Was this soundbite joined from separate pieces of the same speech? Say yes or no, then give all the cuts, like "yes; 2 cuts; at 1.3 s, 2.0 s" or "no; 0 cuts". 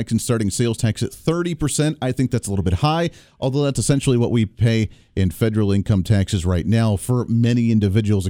no; 0 cuts